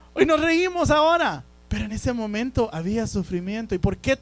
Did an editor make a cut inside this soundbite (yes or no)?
no